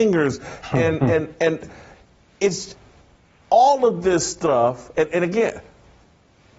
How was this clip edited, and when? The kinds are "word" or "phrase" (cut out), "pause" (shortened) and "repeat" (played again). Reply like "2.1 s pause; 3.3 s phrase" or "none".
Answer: none